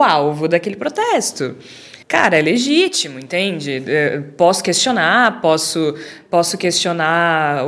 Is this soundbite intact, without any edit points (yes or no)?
no